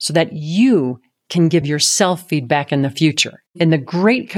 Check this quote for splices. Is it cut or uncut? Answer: uncut